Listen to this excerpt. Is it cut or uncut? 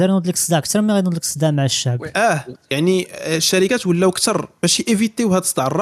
uncut